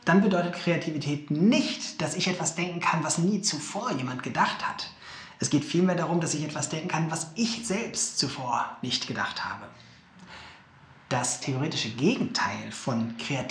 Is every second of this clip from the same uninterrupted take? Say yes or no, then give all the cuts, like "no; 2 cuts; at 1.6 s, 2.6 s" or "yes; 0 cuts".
yes; 0 cuts